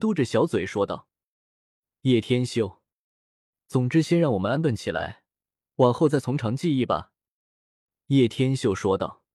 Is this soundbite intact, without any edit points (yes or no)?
yes